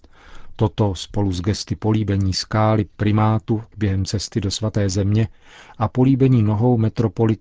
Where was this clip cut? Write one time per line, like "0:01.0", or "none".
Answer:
none